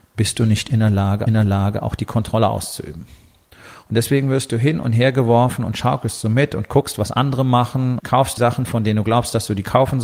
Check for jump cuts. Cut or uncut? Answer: cut